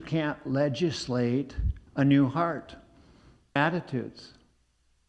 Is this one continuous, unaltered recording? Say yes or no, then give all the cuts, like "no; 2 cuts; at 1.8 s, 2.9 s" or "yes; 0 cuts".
no; 2 cuts; at 1.9 s, 3.6 s